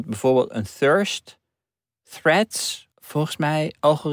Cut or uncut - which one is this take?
cut